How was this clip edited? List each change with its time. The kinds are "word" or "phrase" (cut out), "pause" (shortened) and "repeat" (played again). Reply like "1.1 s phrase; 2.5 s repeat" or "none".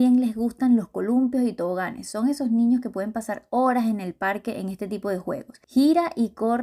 5.6 s pause